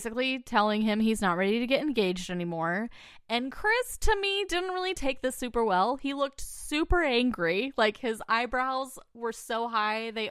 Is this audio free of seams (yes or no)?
yes